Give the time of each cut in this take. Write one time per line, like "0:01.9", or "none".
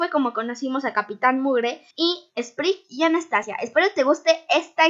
0:01.9